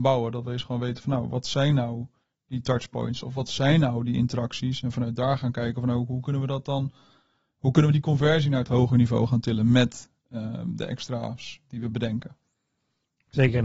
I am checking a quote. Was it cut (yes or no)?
no